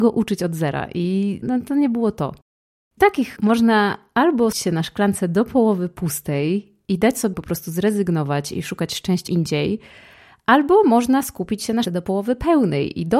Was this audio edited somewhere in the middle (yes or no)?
yes